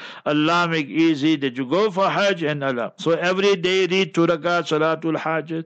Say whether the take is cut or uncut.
uncut